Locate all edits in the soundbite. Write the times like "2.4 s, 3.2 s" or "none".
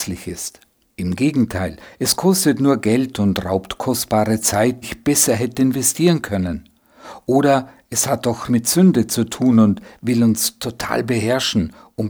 4.8 s, 8.5 s